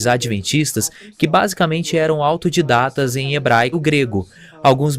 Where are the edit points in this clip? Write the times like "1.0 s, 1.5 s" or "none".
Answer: 3.7 s